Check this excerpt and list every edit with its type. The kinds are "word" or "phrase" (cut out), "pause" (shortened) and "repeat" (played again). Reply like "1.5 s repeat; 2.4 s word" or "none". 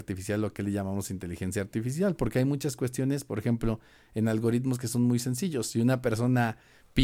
none

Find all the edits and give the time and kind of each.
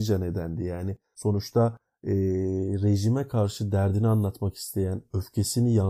none

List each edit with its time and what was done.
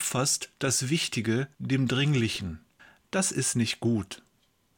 1.5 s pause; 2.8 s pause

